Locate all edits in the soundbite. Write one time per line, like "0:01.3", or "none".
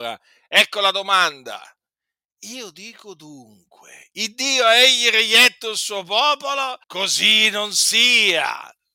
0:06.8